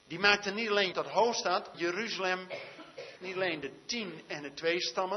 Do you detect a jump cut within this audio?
yes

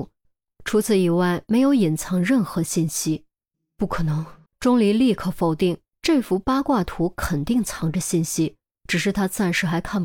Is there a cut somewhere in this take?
yes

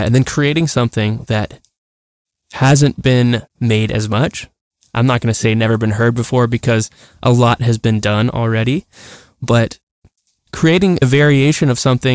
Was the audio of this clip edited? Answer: no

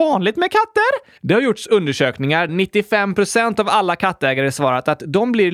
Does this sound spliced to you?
yes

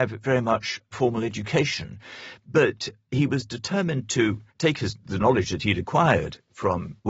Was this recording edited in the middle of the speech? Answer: yes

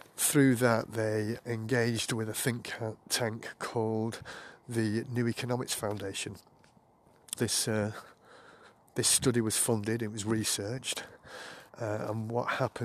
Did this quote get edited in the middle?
yes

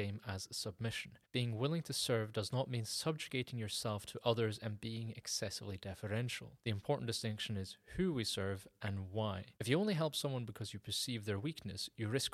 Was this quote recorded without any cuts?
no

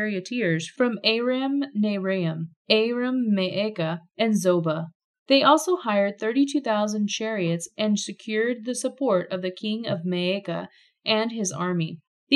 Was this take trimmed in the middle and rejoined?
no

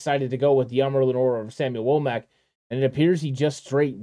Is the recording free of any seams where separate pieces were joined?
yes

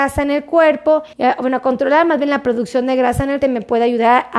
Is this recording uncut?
no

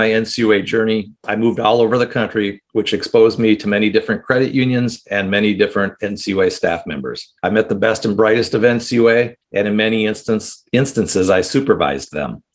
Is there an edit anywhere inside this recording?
yes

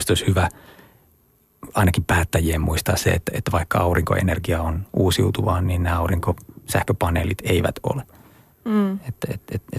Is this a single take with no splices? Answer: yes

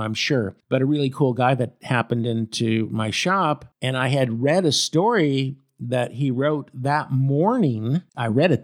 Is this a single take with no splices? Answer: yes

